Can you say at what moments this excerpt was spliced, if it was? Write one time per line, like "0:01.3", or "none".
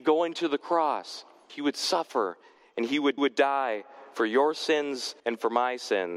0:01.5
0:03.2
0:05.2